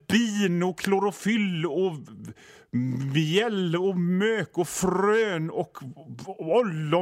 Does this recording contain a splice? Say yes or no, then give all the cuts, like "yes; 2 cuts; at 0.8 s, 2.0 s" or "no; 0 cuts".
no; 0 cuts